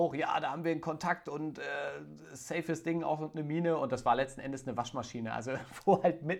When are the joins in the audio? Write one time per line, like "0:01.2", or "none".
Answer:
none